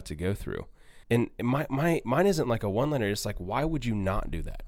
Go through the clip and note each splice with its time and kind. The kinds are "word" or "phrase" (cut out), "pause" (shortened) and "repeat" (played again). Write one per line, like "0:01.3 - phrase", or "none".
0:01.0 - pause